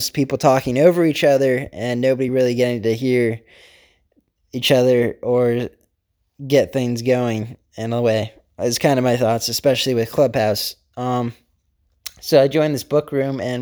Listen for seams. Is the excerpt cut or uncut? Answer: uncut